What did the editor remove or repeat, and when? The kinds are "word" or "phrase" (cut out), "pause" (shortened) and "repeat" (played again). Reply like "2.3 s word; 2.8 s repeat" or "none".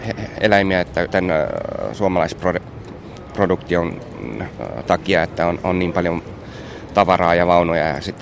1.1 s word